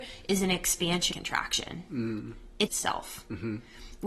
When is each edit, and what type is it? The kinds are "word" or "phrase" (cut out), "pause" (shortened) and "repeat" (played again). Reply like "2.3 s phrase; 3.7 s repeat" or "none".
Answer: 1.1 s word; 2.7 s phrase